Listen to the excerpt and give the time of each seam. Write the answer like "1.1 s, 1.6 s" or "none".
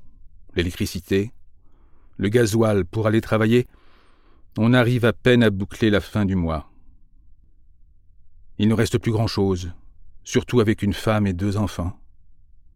none